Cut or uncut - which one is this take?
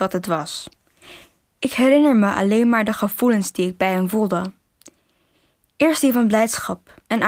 uncut